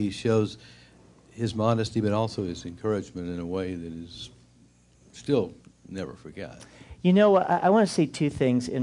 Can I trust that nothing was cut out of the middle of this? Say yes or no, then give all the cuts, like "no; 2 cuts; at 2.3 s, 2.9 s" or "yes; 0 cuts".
yes; 0 cuts